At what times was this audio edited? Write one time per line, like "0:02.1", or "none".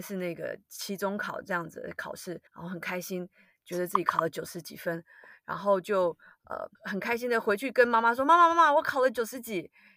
0:02.5
0:06.7